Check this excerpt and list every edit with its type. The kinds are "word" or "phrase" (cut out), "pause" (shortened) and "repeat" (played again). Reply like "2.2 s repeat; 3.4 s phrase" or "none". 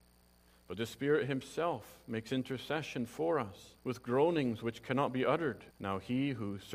3.8 s pause; 5.7 s pause